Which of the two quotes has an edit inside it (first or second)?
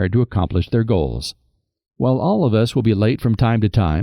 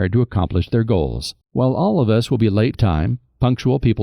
second